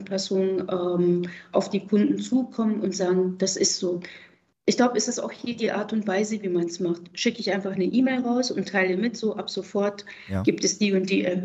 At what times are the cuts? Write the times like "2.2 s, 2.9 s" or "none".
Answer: none